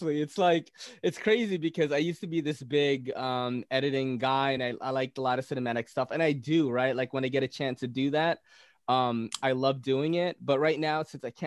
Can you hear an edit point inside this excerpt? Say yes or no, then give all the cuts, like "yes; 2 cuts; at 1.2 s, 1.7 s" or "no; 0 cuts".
no; 0 cuts